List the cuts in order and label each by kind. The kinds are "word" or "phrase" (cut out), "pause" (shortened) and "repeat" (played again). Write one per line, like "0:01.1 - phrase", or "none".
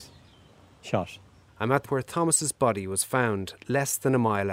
0:01.8 - word